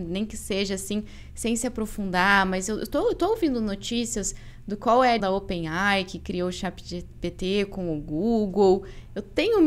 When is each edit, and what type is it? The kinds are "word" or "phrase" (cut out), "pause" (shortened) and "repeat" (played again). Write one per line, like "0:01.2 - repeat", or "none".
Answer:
0:05.2 - word